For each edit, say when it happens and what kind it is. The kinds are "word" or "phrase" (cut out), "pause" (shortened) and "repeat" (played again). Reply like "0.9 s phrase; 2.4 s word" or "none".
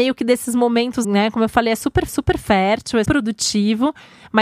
1.0 s word; 2.1 s repeat; 3.1 s word